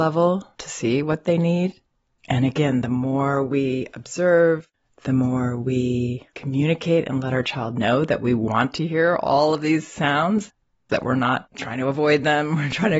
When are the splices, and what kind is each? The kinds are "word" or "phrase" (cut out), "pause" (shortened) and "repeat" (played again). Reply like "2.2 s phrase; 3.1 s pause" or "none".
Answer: none